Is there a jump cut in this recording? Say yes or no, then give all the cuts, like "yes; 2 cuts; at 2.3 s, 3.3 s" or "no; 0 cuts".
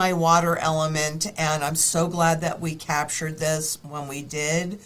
no; 0 cuts